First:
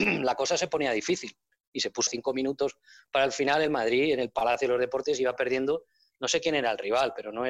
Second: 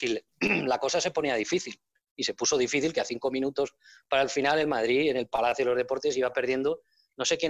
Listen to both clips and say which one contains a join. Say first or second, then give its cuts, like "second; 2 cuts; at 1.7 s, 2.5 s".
first; 1 cut; at 2.1 s